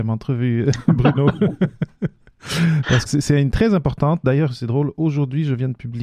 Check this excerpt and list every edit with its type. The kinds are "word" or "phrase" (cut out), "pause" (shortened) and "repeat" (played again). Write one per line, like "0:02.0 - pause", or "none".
0:03.1 - word
0:03.5 - word